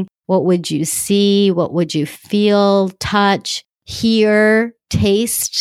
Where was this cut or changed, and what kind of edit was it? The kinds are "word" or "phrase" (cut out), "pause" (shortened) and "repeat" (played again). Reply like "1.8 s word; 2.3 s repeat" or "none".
none